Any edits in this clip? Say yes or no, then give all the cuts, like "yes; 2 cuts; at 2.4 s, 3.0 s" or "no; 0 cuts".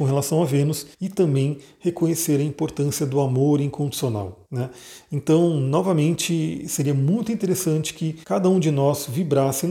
yes; 3 cuts; at 0.9 s, 4.4 s, 8.2 s